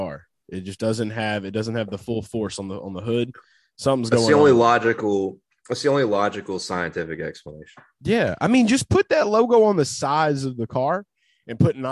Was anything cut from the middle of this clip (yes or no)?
no